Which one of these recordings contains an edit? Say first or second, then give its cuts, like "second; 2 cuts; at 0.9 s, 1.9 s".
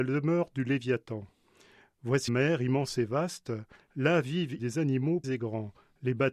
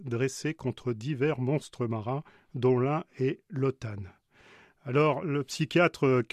first; 3 cuts; at 2.3 s, 4.6 s, 5.2 s